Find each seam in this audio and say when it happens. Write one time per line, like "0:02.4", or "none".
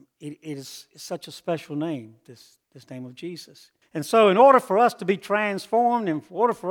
0:02.6
0:03.8